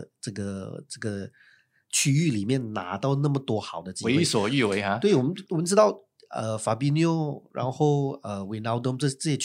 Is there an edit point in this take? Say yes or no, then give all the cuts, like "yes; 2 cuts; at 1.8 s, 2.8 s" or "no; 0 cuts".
no; 0 cuts